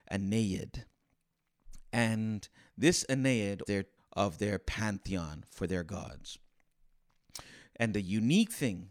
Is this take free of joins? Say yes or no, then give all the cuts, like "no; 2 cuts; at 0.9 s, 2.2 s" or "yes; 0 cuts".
no; 2 cuts; at 3.7 s, 4.0 s